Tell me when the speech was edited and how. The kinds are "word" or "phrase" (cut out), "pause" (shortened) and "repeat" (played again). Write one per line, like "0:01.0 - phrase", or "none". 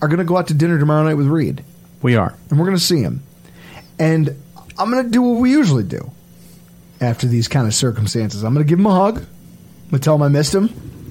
none